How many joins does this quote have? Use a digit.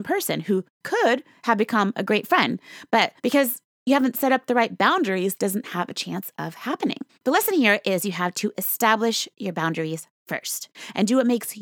3